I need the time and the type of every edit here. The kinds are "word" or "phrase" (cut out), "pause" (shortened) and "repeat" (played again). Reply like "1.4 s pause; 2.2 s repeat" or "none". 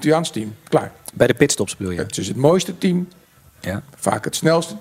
none